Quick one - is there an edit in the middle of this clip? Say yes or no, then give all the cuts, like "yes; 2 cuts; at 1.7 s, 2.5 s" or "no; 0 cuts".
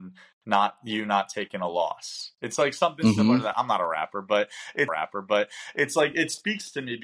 yes; 1 cut; at 4.9 s